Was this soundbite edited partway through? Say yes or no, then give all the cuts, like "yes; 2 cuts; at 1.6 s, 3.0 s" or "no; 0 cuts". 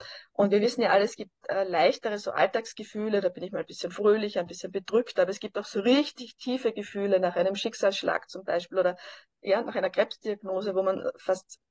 no; 0 cuts